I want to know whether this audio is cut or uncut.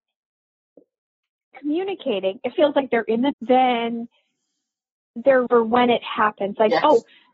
cut